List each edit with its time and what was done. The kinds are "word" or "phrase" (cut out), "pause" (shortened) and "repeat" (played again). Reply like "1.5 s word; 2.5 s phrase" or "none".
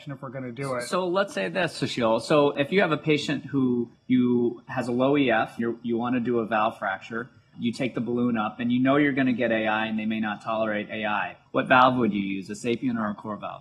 4.0 s pause; 5.6 s word; 7.5 s word; 11.5 s pause